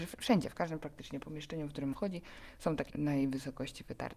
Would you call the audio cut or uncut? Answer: cut